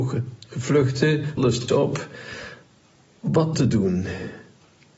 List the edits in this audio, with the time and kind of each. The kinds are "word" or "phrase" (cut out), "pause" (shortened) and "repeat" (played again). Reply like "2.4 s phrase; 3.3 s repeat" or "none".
1.4 s word; 1.7 s phrase; 3.5 s word